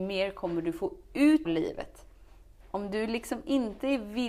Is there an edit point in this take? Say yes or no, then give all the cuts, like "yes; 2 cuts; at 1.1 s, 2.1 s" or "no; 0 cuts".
yes; 1 cut; at 1.4 s